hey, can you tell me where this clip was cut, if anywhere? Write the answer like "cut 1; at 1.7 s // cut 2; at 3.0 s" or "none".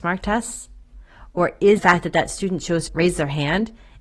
cut 1; at 1.8 s // cut 2; at 2.9 s